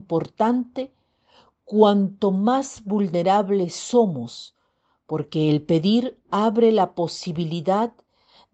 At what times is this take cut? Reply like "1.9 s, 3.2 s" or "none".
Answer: none